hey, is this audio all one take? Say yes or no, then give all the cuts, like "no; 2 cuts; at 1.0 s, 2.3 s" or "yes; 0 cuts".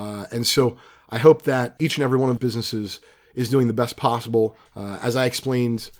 no; 2 cuts; at 2.4 s, 4.7 s